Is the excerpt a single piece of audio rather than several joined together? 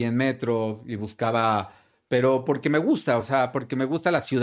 yes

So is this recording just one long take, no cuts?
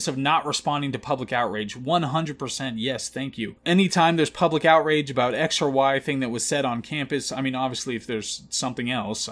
yes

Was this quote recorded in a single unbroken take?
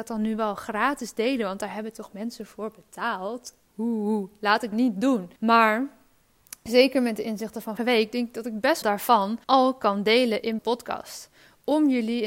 no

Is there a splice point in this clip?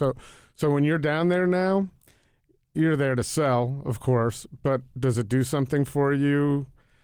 no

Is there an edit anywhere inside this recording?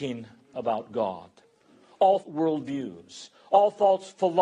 yes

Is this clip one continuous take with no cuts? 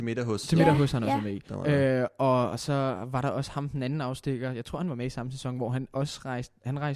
yes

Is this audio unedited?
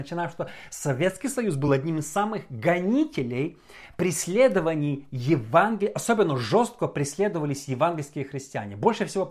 yes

